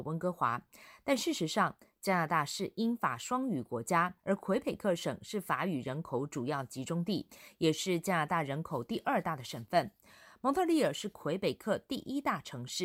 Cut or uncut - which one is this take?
cut